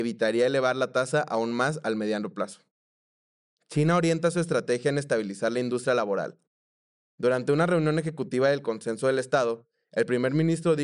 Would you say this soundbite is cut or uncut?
uncut